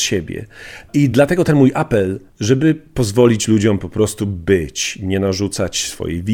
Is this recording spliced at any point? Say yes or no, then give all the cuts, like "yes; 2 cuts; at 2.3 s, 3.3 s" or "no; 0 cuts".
no; 0 cuts